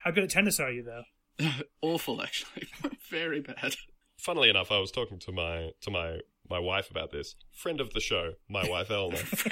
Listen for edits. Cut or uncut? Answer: uncut